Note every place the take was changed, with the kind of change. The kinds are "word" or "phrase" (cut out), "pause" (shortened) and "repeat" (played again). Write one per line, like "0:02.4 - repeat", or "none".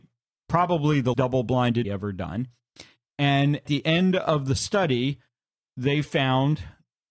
0:01.1 - word
0:01.8 - phrase
0:03.7 - word